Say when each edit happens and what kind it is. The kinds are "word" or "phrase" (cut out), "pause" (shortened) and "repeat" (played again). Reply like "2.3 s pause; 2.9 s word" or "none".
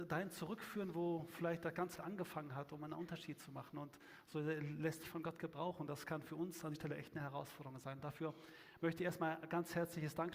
2.0 s word; 5.0 s word; 6.7 s word